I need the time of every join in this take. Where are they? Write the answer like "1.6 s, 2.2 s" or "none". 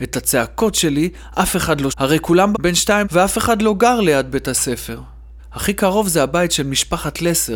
1.9 s, 2.5 s, 3.0 s